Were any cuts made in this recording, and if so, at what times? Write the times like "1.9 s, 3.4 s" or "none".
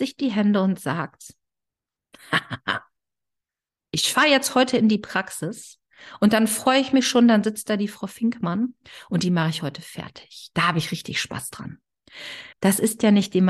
12.5 s